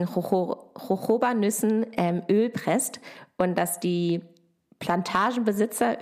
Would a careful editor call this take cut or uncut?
uncut